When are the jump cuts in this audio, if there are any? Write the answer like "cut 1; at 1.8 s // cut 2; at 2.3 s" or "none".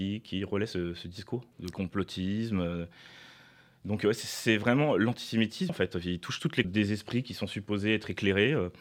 cut 1; at 1.5 s // cut 2; at 5.7 s // cut 3; at 6.6 s